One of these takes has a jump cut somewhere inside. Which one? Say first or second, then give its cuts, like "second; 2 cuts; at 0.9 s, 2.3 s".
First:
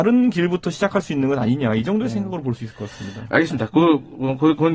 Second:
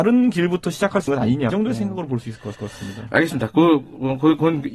second; 3 cuts; at 1.1 s, 1.5 s, 2.5 s